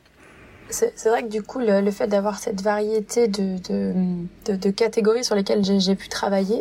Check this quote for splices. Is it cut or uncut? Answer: uncut